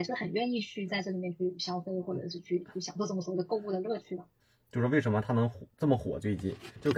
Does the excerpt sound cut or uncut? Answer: uncut